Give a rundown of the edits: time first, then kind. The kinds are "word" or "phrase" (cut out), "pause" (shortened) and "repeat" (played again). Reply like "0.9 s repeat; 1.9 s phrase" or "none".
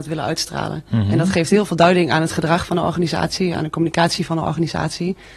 none